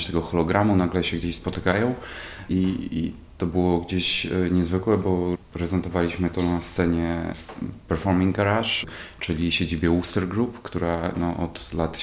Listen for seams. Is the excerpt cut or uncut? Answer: uncut